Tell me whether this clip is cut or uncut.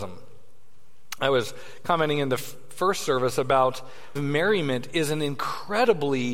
cut